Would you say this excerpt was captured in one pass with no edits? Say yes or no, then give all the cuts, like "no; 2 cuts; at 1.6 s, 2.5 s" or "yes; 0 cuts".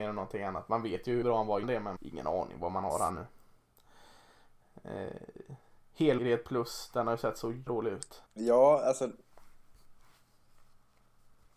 no; 6 cuts; at 1.2 s, 1.6 s, 2.0 s, 6.2 s, 7.7 s, 8.3 s